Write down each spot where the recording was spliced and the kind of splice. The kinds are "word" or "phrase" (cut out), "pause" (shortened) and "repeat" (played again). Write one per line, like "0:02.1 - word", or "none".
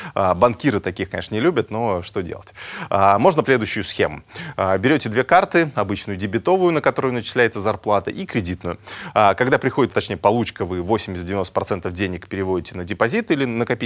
0:03.4 - word
0:09.9 - word